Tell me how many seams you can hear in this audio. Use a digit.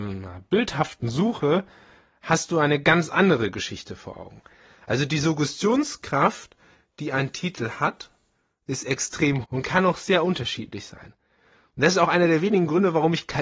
1